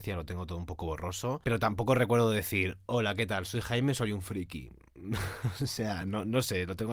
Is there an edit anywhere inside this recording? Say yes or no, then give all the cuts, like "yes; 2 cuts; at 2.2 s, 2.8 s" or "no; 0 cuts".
no; 0 cuts